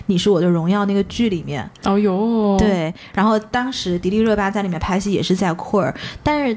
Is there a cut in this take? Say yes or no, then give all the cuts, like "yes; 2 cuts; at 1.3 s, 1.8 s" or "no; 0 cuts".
no; 0 cuts